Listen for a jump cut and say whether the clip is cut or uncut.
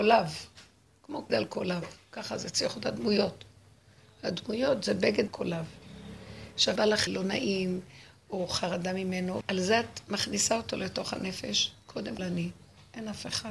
cut